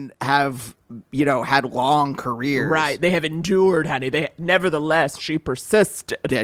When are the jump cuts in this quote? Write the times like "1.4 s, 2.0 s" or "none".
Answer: none